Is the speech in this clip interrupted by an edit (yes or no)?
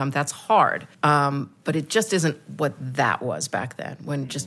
yes